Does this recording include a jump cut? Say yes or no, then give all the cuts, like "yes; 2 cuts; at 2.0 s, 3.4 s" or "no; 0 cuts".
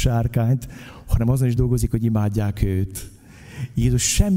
no; 0 cuts